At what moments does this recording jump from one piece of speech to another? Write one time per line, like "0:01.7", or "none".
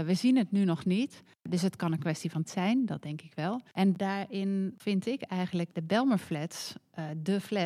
0:02.5